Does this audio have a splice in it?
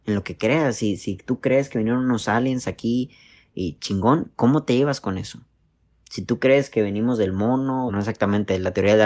yes; 1 cut; at 7.9 s

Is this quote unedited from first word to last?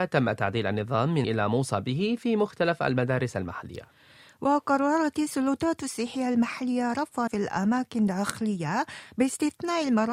no; 2 cuts; at 1.2 s, 7.3 s

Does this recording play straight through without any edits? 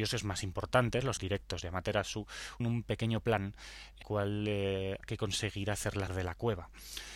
no; 5 cuts; at 1.2 s, 2.6 s, 4.0 s, 5.0 s, 6.1 s

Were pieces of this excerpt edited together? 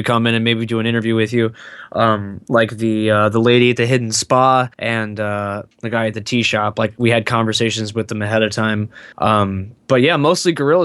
yes; 3 cuts; at 4.7 s, 5.7 s, 9.1 s

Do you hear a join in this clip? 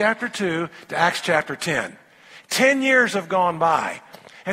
no; 0 cuts

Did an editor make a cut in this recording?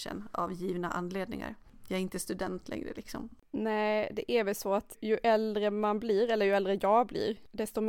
yes; 1 cut; at 4.9 s

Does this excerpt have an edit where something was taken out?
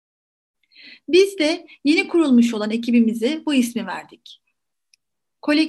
no; 0 cuts

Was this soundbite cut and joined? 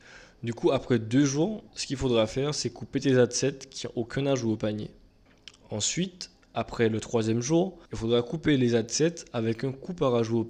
yes; 3 cuts; at 1.7 s, 5.3 s, 7.9 s

